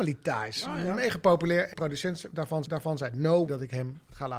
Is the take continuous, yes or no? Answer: no